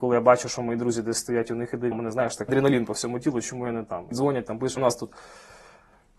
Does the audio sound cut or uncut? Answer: cut